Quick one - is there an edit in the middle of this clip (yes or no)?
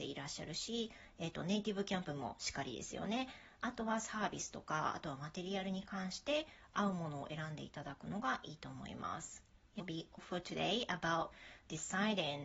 yes